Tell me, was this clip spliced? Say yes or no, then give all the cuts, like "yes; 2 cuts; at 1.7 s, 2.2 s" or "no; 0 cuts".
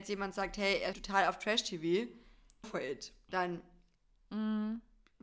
yes; 2 cuts; at 0.9 s, 2.6 s